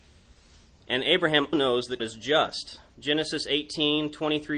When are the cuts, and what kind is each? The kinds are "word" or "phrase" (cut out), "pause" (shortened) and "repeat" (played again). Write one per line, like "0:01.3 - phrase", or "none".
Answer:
0:01.5 - word
0:02.0 - word
0:02.9 - pause